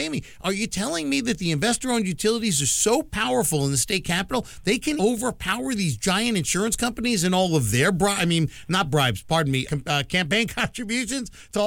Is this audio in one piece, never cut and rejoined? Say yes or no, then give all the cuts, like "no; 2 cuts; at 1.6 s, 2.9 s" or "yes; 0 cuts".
no; 2 cuts; at 5.0 s, 9.6 s